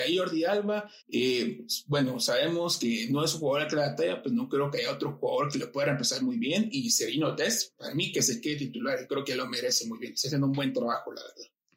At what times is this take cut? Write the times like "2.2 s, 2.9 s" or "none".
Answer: 1.0 s